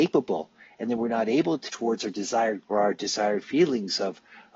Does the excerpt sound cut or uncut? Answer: cut